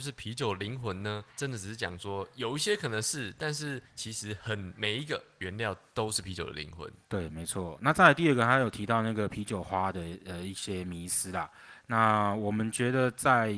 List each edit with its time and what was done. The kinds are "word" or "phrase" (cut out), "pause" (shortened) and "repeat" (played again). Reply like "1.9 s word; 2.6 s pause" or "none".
1.3 s pause; 3.9 s pause